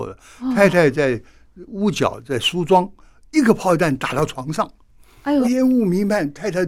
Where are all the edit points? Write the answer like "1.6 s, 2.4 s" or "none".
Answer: 5.4 s